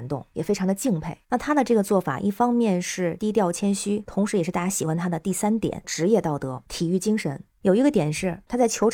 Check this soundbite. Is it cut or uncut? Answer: cut